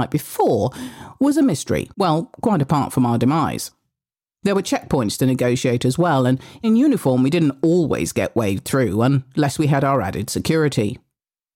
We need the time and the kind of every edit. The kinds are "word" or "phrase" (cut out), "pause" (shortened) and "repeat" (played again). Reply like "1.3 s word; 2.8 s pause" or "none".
1.9 s pause; 6.6 s word